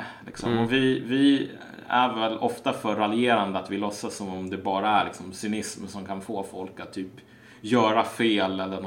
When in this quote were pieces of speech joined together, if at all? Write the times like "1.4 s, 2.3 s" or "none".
none